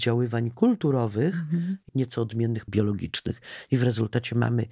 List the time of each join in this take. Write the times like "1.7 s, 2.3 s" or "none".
1.9 s, 2.7 s